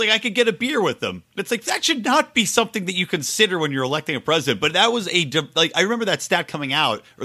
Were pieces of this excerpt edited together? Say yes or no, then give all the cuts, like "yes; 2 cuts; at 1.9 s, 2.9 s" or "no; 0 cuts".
no; 0 cuts